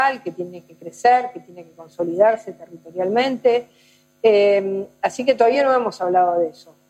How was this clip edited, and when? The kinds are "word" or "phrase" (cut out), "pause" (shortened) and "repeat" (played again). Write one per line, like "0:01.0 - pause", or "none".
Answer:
none